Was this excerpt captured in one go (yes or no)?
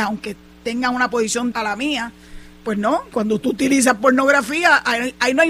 no